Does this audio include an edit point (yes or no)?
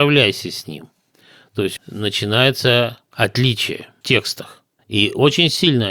yes